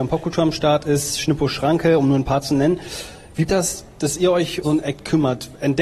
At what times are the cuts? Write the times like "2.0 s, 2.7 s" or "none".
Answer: 3.5 s, 4.6 s